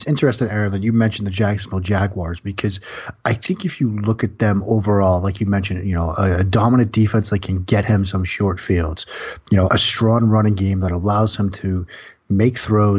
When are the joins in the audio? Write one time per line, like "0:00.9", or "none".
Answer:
0:09.7